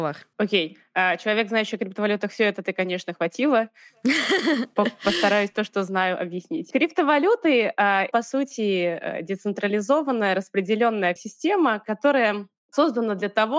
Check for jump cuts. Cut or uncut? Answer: cut